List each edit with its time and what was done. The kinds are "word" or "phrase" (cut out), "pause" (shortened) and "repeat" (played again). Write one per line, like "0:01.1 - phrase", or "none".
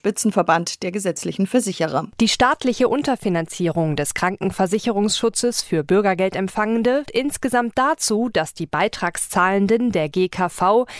0:07.1 - word